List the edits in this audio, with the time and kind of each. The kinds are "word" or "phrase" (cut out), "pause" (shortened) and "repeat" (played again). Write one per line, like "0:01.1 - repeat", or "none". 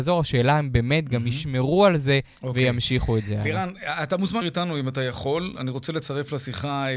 0:04.4 - word